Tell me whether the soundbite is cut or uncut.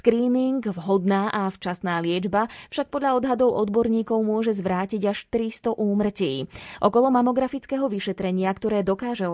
uncut